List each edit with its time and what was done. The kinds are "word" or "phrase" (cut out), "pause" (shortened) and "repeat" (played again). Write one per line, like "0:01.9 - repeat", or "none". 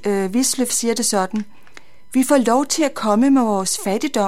none